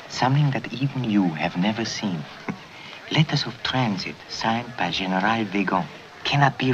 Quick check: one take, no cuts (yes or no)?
yes